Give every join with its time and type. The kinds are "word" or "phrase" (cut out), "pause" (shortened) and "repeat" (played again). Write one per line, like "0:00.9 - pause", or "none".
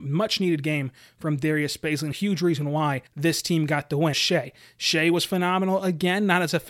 0:02.1 - phrase
0:03.1 - pause
0:04.1 - phrase